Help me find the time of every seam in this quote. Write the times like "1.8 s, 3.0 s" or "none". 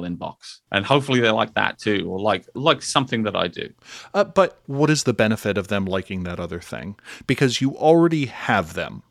none